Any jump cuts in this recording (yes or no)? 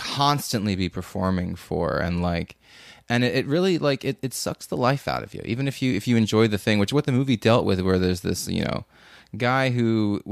no